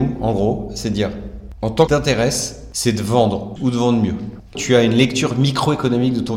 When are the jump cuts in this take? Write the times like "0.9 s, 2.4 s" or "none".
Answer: 1.9 s, 3.6 s, 4.5 s